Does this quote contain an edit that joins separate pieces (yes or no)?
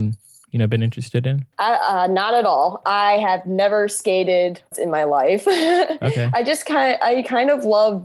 yes